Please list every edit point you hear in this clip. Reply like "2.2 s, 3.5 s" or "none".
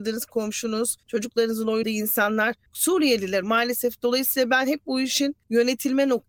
1.8 s, 3.4 s